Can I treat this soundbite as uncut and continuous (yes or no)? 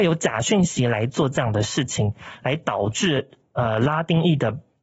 yes